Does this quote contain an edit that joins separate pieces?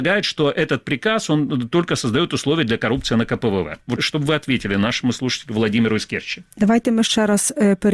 yes; 1 cut; at 4.0 s

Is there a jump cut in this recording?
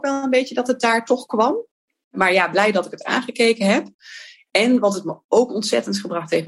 no; 0 cuts

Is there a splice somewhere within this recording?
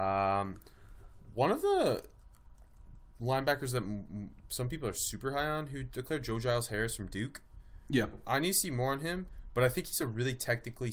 no; 0 cuts

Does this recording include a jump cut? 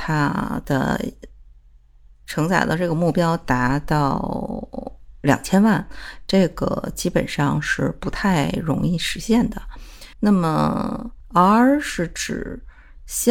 yes; 2 cuts; at 10.1 s, 11.2 s

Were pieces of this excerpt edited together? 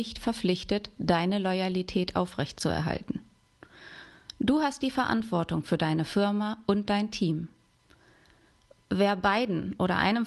no; 0 cuts

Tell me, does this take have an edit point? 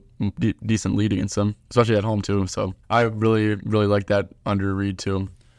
yes; 1 cut; at 2.8 s

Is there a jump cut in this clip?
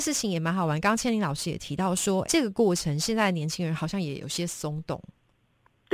yes; 1 cut; at 2.2 s

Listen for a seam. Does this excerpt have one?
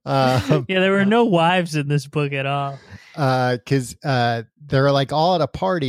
no; 0 cuts

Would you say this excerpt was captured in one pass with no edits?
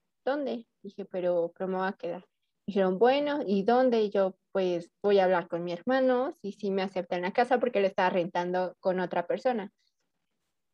yes; 0 cuts

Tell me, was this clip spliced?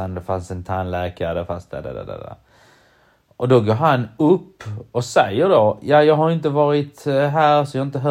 no; 0 cuts

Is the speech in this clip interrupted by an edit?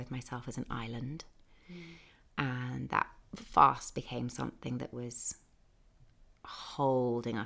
no; 0 cuts

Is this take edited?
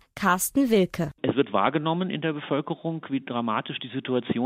no; 0 cuts

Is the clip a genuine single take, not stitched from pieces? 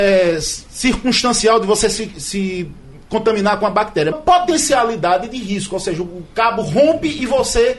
no; 2 cuts; at 2.1 s, 4.1 s

